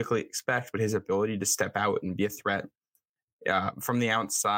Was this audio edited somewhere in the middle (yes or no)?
no